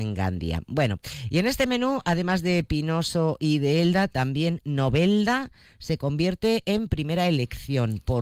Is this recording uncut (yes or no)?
yes